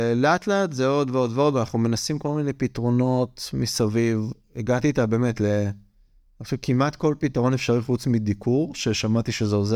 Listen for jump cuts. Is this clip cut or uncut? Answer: uncut